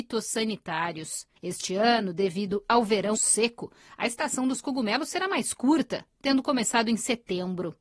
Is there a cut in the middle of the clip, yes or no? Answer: yes